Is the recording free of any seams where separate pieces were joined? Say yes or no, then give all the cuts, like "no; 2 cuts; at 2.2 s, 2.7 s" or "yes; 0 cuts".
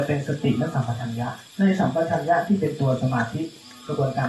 no; 1 cut; at 1.5 s